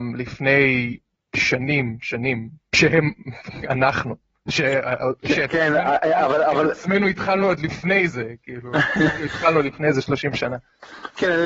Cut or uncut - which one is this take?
uncut